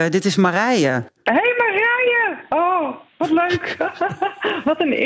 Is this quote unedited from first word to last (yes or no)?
no